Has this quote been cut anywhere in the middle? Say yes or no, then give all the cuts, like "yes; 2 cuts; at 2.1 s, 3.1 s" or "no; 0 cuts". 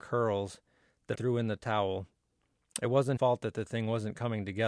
yes; 2 cuts; at 1.1 s, 3.2 s